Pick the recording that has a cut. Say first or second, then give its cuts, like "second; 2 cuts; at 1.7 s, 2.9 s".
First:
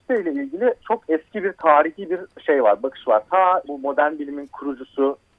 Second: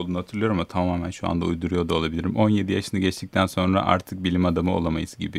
first; 1 cut; at 3.7 s